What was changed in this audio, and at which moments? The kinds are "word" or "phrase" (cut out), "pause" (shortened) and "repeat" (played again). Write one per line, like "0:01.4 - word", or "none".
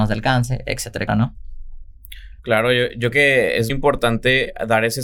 0:01.1 - word
0:02.4 - pause
0:03.1 - word
0:03.7 - word